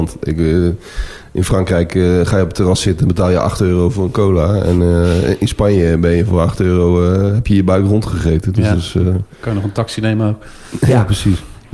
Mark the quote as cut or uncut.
uncut